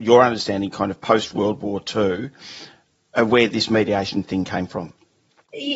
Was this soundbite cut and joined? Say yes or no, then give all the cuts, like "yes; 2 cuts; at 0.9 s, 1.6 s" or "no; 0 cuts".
no; 0 cuts